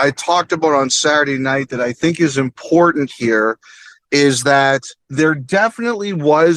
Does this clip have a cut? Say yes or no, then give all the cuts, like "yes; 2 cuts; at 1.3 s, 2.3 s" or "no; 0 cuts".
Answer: yes; 1 cut; at 5.0 s